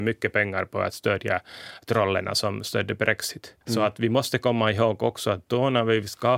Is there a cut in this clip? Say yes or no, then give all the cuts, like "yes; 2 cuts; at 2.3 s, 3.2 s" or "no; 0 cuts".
yes; 1 cut; at 3.6 s